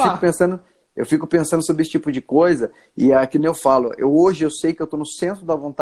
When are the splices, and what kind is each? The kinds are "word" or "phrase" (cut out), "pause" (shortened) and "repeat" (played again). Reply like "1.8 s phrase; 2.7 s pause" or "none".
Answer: none

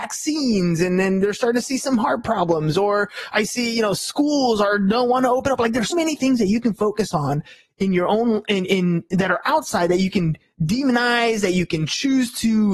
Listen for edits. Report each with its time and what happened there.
5.9 s word

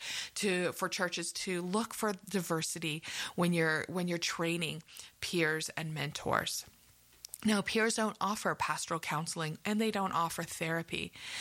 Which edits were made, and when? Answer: none

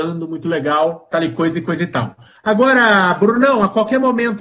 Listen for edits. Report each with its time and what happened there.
none

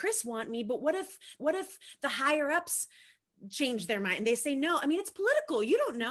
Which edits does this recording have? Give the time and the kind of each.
1.4 s repeat

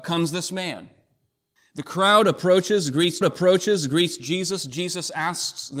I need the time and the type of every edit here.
1.6 s pause; 3.2 s repeat

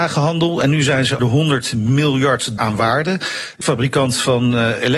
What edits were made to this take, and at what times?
1.2 s word; 2.6 s word; 3.6 s word

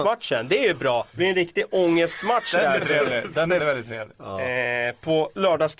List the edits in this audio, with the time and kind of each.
1.1 s pause; 3.6 s word

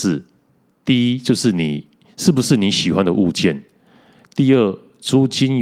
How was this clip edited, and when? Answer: none

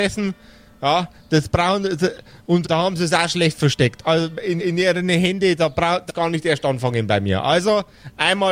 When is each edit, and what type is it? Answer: 2.6 s word; 4.6 s repeat; 6.1 s word

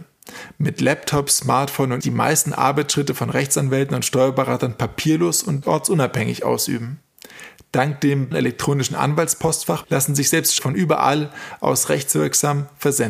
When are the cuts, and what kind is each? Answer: 2.0 s phrase; 5.6 s word; 8.3 s word; 9.8 s word; 10.6 s word

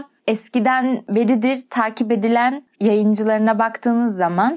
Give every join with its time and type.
2.7 s word

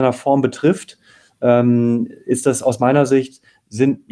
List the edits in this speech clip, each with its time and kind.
none

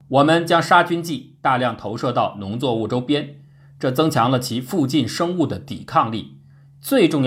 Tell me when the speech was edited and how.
none

